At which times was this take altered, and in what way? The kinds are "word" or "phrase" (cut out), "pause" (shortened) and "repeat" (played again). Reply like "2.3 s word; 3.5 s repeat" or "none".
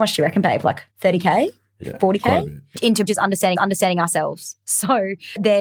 0.9 s pause; 3.1 s word; 3.6 s repeat